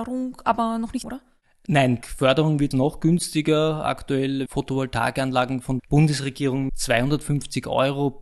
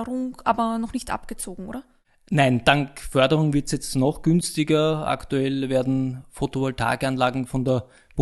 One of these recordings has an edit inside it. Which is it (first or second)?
first